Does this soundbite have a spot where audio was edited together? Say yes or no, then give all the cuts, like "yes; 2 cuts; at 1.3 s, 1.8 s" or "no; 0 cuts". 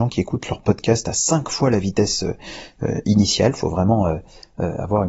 no; 0 cuts